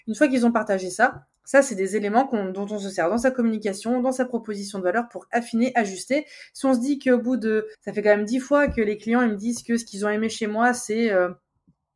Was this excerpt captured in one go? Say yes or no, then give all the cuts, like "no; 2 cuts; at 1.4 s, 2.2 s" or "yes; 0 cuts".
no; 1 cut; at 7.7 s